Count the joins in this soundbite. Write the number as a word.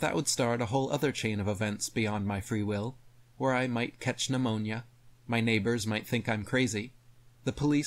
zero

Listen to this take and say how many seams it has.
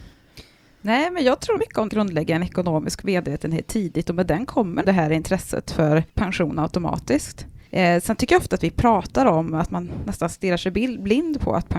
five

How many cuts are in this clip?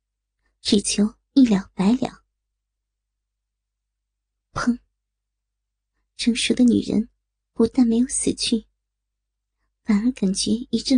zero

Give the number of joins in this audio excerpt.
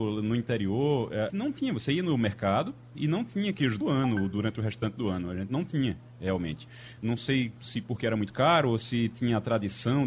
two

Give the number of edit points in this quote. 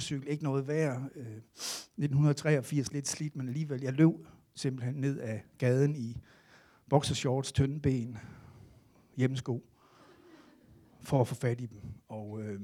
zero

